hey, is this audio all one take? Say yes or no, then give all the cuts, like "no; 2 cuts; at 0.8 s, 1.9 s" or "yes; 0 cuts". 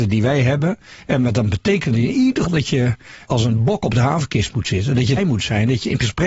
no; 3 cuts; at 2.4 s, 3.3 s, 5.2 s